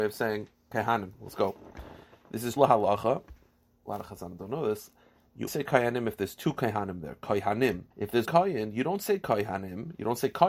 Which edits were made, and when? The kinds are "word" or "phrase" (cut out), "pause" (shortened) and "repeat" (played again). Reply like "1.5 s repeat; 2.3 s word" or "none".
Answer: 2.6 s word; 5.5 s word; 7.9 s pause; 8.3 s word